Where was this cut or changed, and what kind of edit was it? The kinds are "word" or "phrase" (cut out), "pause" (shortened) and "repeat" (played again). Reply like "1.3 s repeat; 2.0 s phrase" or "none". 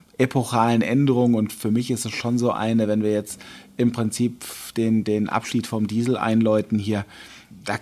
none